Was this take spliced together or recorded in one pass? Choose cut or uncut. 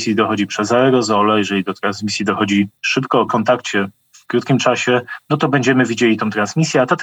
cut